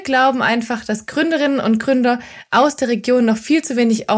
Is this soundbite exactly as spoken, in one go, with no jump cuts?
yes; 0 cuts

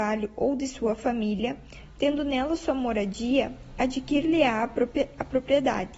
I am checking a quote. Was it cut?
no; 0 cuts

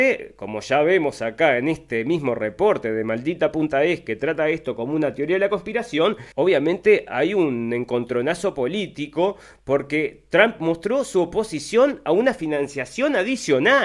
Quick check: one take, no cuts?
no; 1 cut; at 6.3 s

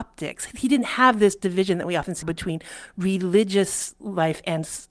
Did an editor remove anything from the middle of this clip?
yes; 1 cut; at 2.2 s

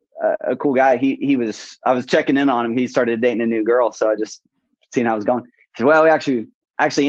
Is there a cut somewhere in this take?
no; 0 cuts

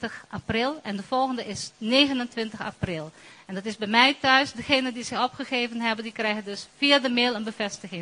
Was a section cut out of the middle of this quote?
no; 0 cuts

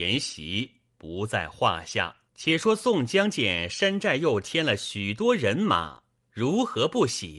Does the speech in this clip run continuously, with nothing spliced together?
no; 1 cut; at 2.3 s

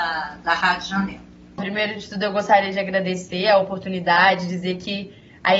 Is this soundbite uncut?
yes; 0 cuts

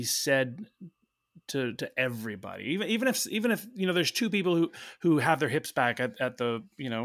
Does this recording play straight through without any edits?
no; 1 cut; at 1.8 s

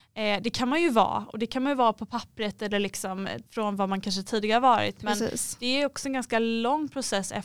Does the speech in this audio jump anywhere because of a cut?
yes; 1 cut; at 3.5 s

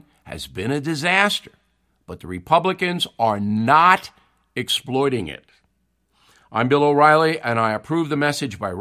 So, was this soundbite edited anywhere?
no; 0 cuts

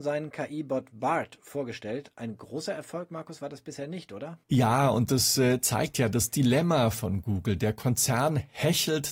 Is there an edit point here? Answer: yes; 1 cut; at 4.4 s

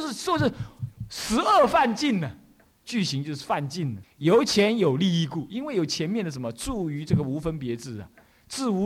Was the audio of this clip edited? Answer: yes; 1 cut; at 4.0 s

